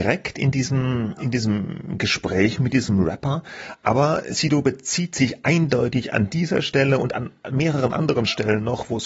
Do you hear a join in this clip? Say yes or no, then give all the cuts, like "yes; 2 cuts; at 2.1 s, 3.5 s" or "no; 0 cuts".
no; 0 cuts